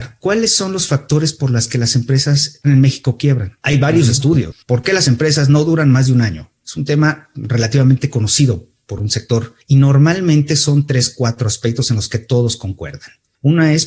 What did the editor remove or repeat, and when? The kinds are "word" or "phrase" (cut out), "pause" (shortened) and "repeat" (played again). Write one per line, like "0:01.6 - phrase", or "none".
0:02.6 - word